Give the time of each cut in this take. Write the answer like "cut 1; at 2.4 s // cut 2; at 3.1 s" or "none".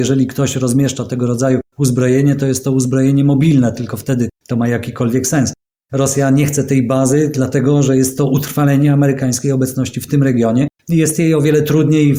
none